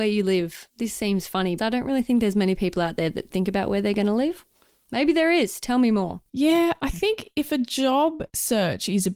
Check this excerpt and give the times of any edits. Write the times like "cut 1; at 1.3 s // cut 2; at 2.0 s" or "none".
cut 1; at 1.6 s // cut 2; at 3.3 s